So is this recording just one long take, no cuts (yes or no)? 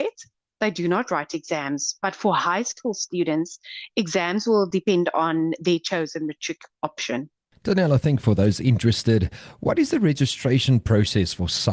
yes